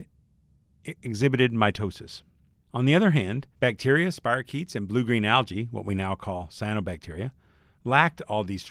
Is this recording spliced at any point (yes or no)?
yes